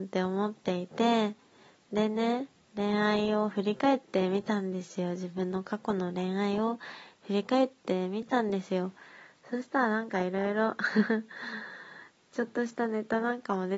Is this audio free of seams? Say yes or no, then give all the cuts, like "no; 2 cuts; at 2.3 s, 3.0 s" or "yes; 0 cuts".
yes; 0 cuts